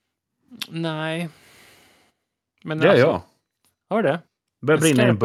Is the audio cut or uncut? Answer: uncut